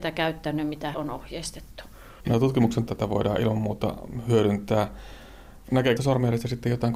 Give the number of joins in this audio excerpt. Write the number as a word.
three